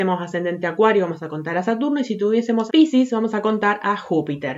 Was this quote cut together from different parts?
yes; 1 cut; at 2.7 s

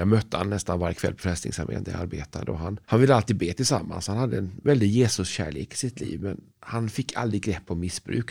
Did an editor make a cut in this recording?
yes; 2 cuts; at 2.8 s, 6.5 s

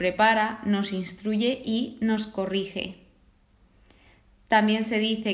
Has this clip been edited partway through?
no; 0 cuts

